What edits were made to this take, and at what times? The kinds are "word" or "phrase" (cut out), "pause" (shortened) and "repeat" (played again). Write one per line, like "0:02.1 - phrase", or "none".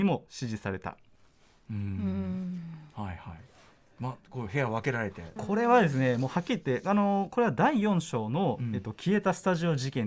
0:05.4 - phrase